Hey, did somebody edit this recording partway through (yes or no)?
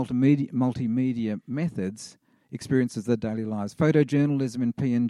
yes